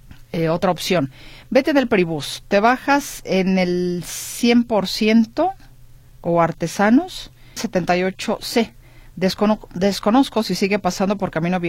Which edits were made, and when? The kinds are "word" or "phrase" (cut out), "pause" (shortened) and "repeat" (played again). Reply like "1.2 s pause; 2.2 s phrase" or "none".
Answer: 7.6 s phrase